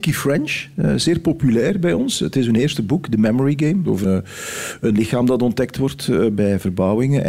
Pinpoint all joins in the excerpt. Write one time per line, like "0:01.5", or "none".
0:04.0